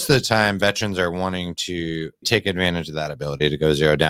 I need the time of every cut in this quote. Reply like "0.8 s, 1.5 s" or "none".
2.2 s